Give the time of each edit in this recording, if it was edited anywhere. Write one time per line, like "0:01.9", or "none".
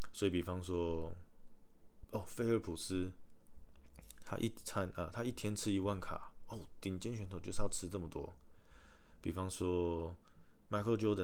none